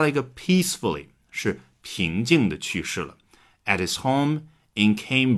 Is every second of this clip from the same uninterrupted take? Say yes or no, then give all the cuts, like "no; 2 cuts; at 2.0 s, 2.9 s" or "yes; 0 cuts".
yes; 0 cuts